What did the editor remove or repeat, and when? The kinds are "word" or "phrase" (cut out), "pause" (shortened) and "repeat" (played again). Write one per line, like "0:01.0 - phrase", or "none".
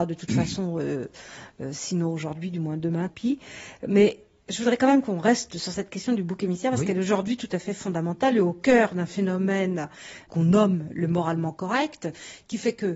0:03.1 - word